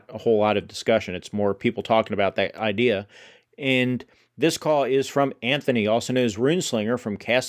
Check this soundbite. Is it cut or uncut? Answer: uncut